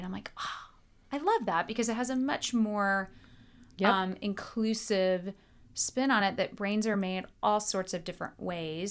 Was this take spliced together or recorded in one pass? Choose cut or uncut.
uncut